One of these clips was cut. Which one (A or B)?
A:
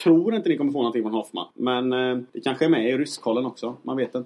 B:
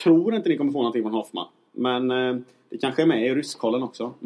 A